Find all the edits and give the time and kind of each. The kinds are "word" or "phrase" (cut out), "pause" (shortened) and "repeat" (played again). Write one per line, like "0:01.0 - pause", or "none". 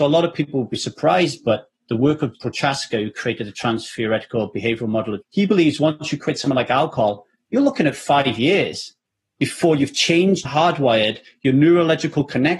0:02.3 - word
0:05.2 - word
0:10.4 - word